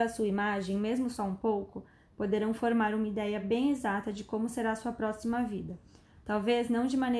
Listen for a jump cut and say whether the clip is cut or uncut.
uncut